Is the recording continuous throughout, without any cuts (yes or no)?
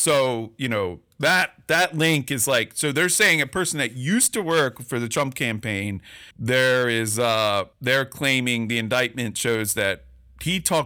no